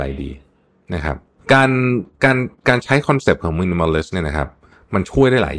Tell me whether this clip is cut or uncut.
uncut